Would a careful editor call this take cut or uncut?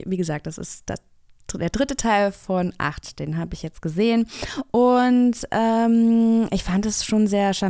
uncut